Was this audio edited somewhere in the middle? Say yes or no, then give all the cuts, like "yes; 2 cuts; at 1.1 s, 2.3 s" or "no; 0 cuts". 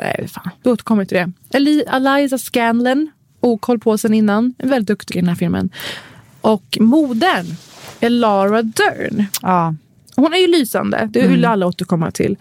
yes; 1 cut; at 5.1 s